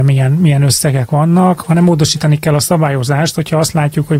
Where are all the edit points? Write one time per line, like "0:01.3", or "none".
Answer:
none